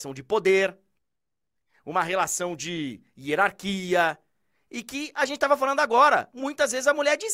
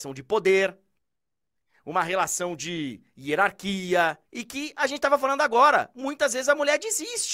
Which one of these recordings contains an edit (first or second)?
second